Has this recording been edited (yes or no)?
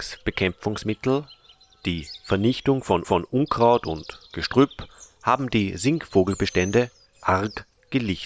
yes